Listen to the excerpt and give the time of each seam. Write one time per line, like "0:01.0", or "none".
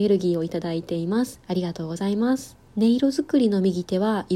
0:02.7